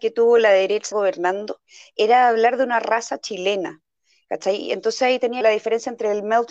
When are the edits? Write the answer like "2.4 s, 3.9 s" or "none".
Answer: 0.9 s, 5.4 s